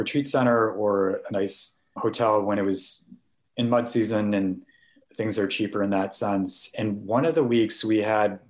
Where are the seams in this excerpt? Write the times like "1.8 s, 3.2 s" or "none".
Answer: 2.0 s

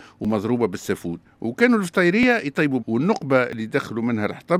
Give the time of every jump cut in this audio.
2.8 s

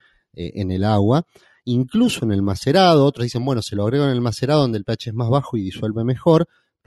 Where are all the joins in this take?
none

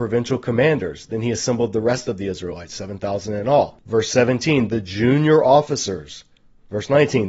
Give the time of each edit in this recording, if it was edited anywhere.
none

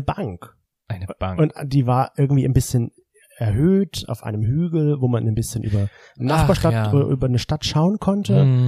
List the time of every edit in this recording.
none

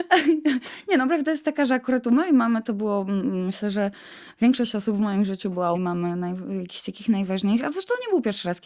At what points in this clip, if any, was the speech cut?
5.7 s

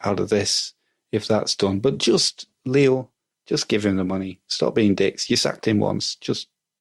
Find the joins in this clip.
none

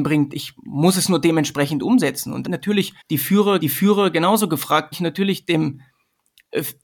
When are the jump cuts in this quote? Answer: 2.5 s, 3.0 s, 3.6 s, 4.9 s

